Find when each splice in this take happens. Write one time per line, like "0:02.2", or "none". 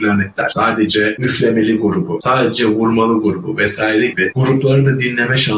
none

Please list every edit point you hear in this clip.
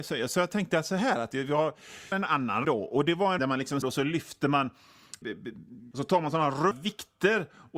0:02.1
0:02.6
0:03.4
0:03.8
0:05.2
0:05.9
0:06.7

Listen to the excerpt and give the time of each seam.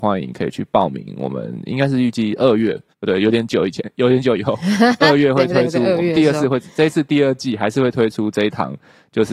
0:02.9

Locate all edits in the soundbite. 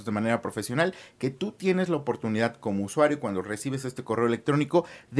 none

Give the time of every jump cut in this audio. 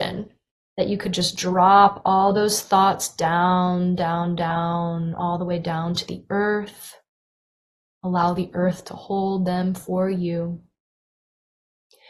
none

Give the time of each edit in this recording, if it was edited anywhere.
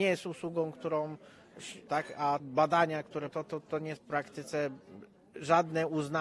0:01.9
0:02.4
0:03.3
0:04.0

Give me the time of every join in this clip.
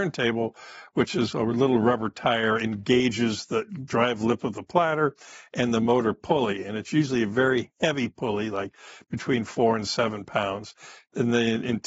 none

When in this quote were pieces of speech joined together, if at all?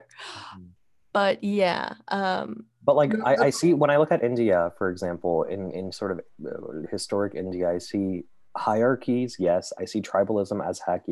none

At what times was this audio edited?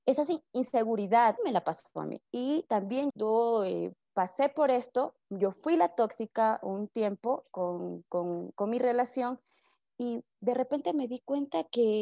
0:01.4
0:02.3
0:03.1

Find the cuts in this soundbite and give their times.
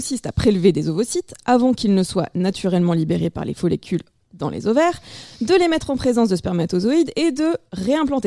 none

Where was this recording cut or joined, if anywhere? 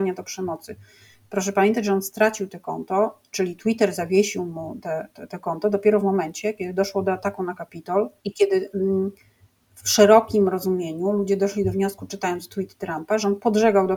0:08.2

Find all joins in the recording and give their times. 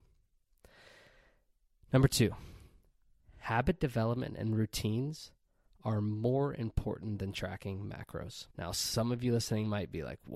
0:08.5

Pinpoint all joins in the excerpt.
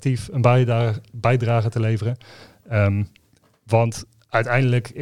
none

